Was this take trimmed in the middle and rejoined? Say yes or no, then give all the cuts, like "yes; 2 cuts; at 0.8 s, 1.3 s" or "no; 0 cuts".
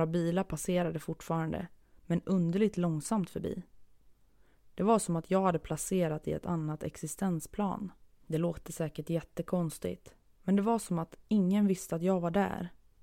no; 0 cuts